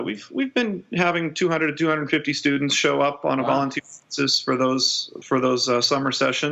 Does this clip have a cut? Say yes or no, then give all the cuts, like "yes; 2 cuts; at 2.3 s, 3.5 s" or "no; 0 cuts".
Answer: no; 0 cuts